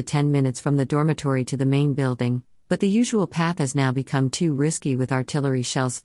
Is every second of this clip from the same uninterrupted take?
yes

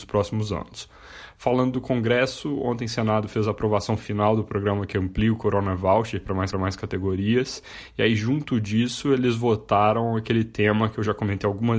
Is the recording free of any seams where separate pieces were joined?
no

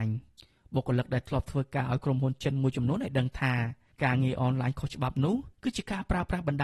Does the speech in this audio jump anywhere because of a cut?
yes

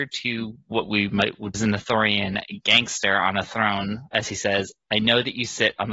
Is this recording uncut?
no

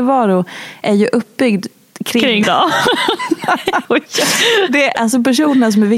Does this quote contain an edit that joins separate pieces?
yes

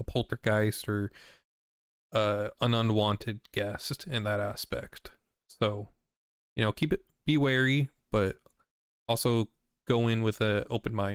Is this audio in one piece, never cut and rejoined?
yes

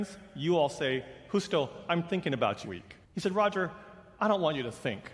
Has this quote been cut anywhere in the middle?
yes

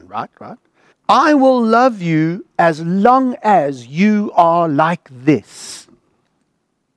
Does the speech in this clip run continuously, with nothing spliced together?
no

